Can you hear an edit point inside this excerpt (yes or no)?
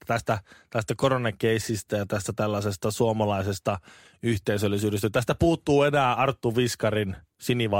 no